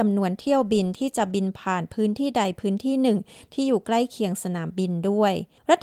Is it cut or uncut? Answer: uncut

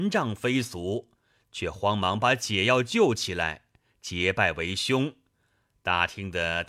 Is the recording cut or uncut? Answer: uncut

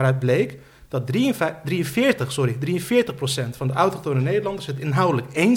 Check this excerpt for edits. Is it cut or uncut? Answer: uncut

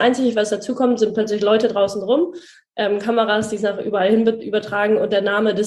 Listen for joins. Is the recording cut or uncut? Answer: uncut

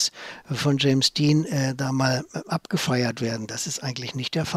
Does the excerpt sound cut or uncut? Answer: uncut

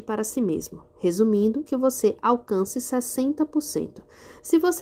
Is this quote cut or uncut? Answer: cut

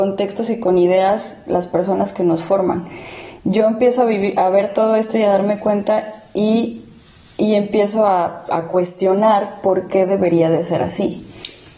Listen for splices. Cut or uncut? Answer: uncut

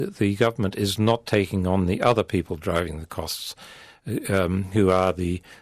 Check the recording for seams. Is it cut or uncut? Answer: uncut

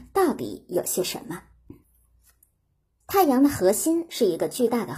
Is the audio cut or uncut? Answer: uncut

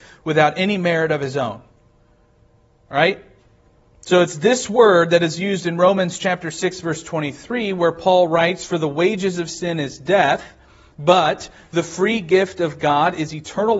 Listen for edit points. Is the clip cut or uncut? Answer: uncut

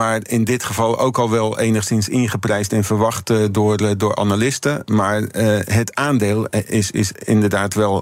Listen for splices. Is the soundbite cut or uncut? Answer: uncut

